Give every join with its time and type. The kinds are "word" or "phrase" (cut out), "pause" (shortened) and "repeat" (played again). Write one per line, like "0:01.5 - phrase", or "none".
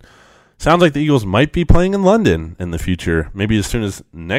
none